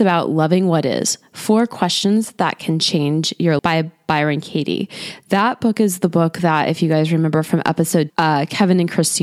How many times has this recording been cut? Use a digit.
2